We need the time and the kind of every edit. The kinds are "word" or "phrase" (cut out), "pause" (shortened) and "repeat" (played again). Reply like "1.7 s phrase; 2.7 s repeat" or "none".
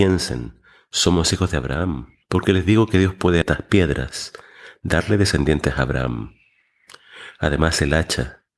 2.2 s pause; 3.4 s phrase